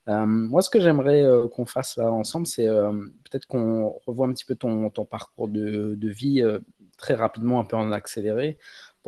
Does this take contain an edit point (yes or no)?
no